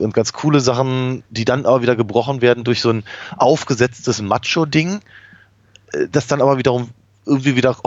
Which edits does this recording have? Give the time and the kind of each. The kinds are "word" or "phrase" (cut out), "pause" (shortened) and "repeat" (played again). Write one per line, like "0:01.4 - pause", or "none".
0:01.3 - pause